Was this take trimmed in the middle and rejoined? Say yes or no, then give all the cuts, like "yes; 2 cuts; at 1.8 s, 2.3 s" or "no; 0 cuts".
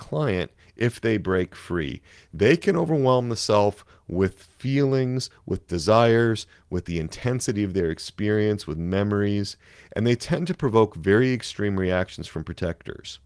no; 0 cuts